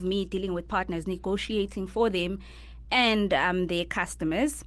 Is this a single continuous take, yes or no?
yes